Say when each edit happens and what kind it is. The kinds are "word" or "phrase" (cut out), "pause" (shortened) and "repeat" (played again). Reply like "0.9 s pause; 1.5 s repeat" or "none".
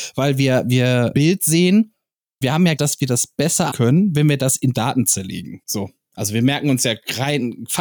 1.1 s phrase; 2.4 s word; 2.8 s word; 3.7 s word; 5.6 s pause